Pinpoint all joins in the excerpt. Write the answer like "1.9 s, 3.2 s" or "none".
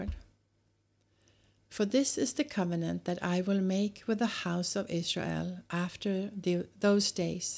none